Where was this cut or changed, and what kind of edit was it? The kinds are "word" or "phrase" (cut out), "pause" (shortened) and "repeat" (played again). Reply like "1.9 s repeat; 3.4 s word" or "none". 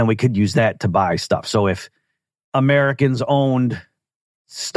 none